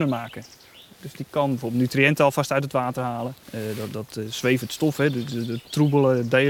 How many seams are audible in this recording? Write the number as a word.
one